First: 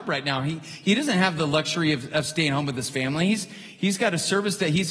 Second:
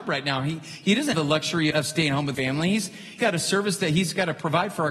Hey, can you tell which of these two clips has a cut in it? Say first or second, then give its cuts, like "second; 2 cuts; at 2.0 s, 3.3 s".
second; 4 cuts; at 1.1 s, 1.7 s, 2.3 s, 3.2 s